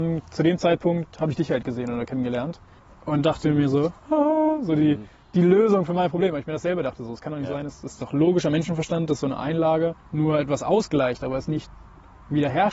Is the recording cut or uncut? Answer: cut